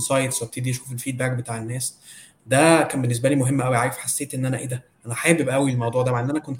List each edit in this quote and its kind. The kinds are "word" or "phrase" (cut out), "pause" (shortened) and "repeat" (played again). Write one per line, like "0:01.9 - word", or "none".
0:04.9 - pause